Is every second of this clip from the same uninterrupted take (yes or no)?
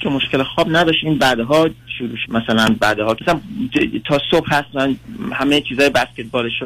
no